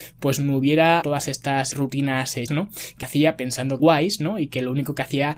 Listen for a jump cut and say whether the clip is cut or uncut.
cut